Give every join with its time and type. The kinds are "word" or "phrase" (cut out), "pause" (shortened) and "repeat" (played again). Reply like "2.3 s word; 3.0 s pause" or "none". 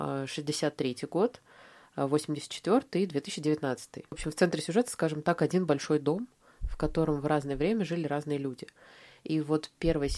none